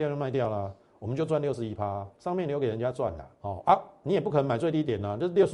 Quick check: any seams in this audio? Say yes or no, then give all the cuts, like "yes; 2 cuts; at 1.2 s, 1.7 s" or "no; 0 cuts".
yes; 2 cuts; at 2.1 s, 3.4 s